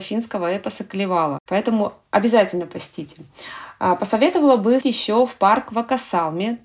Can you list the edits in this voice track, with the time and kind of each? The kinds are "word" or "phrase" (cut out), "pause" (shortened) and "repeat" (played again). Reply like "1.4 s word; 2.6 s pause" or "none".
4.8 s word

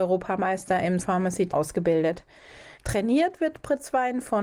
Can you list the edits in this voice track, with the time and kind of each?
1.0 s word; 1.5 s word; 2.8 s pause

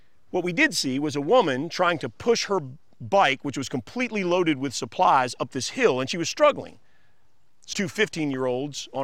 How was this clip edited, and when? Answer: 7.7 s word

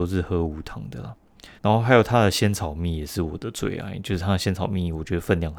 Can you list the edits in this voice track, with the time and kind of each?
1.6 s pause

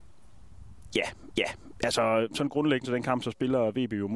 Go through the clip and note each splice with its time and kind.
1.4 s repeat; 2.8 s phrase

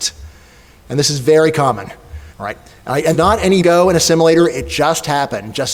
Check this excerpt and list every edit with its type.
2.3 s pause; 3.1 s phrase; 3.6 s phrase

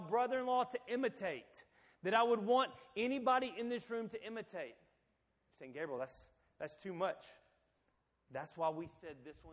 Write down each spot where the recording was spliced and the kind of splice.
none

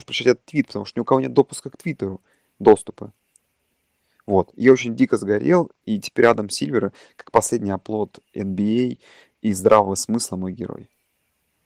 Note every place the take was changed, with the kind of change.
none

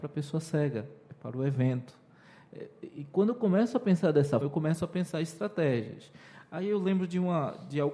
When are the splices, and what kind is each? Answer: 4.4 s word

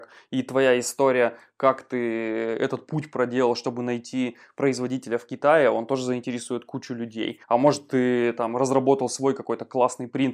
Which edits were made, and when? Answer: 7.4 s pause

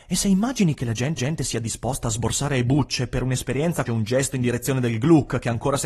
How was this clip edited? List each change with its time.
1.2 s repeat; 3.9 s phrase

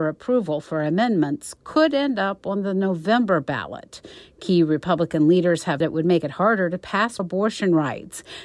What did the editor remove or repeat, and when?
5.8 s word; 7.2 s phrase

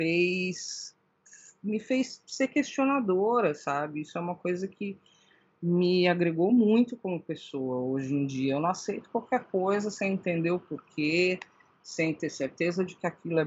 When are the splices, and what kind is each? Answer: none

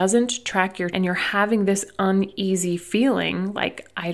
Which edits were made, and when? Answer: 0.9 s word

